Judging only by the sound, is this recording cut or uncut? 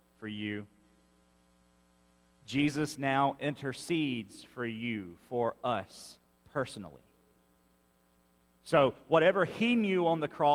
cut